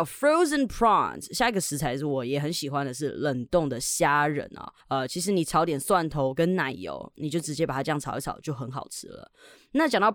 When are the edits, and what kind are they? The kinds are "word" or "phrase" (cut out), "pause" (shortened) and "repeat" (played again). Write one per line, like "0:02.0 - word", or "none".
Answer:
0:04.8 - pause